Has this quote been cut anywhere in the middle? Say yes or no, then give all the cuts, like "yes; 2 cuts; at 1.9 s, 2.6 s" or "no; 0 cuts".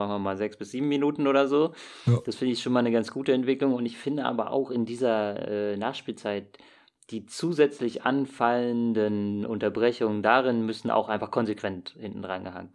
no; 0 cuts